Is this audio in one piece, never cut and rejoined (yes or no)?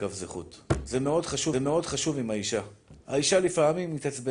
no